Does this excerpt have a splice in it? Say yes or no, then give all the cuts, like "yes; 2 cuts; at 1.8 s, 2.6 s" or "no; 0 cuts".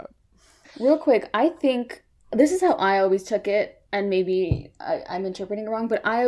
yes; 1 cut; at 3.9 s